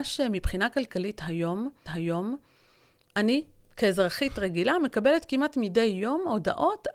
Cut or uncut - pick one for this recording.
cut